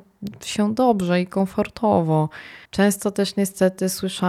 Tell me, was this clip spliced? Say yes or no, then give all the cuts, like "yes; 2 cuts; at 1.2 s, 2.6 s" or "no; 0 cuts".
yes; 1 cut; at 2.6 s